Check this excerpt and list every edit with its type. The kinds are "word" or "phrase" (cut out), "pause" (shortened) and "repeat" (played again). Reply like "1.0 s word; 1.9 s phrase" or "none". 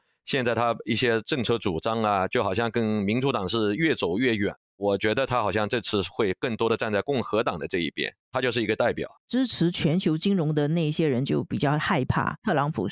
8.2 s pause; 9.2 s pause